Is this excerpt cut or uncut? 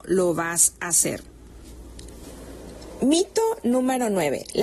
uncut